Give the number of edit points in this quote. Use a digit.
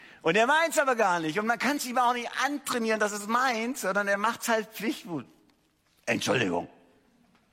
0